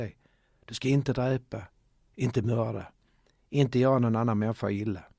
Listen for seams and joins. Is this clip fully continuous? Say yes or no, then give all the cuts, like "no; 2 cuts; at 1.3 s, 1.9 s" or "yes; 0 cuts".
yes; 0 cuts